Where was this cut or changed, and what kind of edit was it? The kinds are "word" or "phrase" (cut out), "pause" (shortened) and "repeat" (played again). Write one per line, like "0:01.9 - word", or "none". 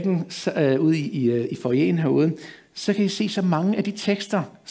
none